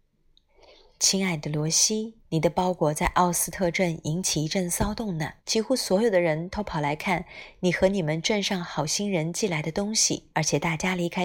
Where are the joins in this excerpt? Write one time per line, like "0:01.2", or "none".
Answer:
0:02.2
0:05.4
0:10.3